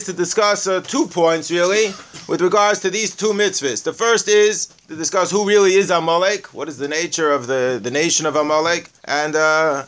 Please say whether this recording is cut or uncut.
cut